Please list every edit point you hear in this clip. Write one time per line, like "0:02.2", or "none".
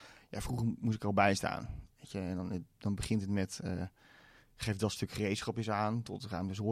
none